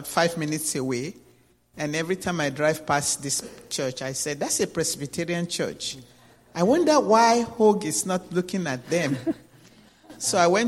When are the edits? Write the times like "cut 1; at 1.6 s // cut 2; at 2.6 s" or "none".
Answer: none